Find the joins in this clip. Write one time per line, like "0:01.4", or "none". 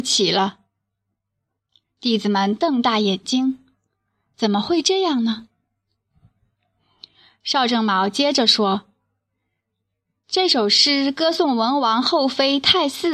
none